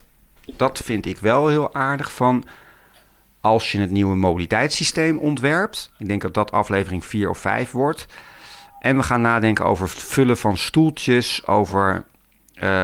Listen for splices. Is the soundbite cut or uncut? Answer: uncut